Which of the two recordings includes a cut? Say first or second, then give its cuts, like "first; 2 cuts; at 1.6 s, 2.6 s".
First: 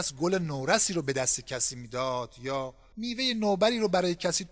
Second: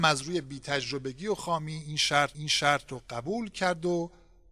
second; 1 cut; at 2.3 s